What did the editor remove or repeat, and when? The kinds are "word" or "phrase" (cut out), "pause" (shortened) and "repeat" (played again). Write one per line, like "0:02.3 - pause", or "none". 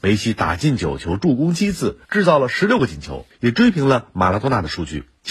0:02.0 - pause